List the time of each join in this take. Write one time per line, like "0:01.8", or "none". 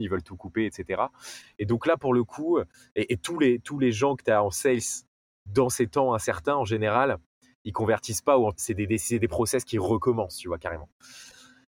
0:08.5